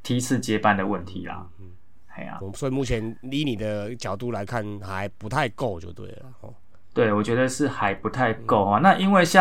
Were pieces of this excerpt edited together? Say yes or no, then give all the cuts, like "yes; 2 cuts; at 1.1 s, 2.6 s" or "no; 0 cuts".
yes; 1 cut; at 2.4 s